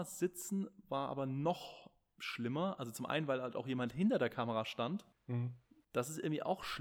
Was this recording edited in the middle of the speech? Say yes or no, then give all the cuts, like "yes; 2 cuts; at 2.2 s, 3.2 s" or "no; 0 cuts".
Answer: no; 0 cuts